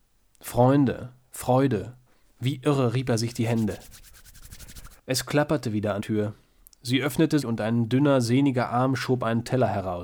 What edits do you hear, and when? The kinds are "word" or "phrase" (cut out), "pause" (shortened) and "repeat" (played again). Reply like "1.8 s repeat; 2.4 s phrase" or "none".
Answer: 2.1 s pause; 5.0 s pause; 6.0 s word; 7.4 s word